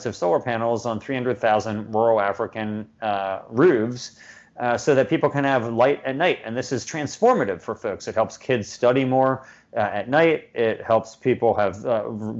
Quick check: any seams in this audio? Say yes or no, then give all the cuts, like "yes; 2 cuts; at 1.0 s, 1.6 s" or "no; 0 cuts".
no; 0 cuts